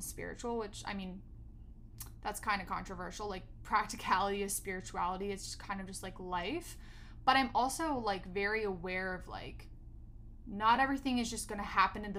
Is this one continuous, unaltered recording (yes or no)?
yes